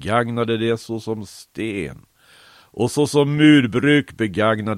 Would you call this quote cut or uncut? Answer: uncut